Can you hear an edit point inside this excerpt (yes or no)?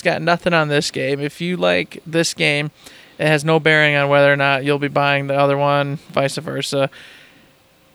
no